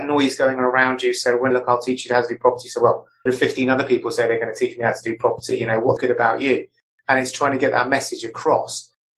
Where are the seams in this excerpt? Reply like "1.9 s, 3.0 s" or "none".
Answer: 1.5 s, 3.3 s, 6.0 s